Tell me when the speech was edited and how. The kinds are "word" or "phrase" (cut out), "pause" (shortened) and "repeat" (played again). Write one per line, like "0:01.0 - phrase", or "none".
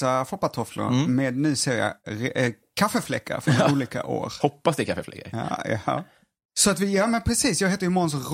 none